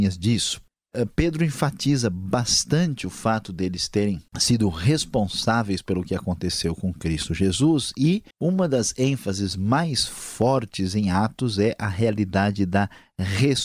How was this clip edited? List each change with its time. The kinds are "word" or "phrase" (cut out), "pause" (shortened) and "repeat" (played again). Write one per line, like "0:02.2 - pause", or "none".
0:04.3 - pause
0:08.3 - pause